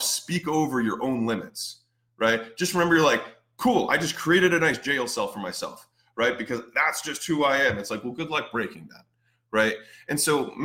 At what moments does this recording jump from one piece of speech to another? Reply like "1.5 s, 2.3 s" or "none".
none